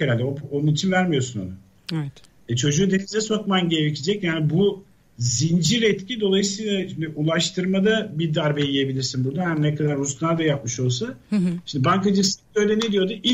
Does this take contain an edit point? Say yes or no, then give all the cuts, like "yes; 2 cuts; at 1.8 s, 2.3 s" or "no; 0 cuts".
no; 0 cuts